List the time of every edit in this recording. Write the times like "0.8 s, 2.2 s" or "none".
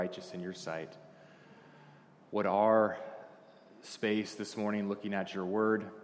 none